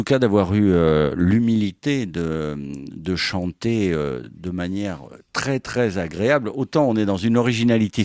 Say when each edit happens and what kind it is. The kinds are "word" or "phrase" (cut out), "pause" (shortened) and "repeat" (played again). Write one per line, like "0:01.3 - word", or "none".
none